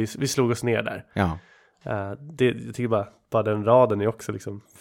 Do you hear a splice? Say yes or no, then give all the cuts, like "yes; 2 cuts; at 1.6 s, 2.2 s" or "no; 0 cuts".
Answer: no; 0 cuts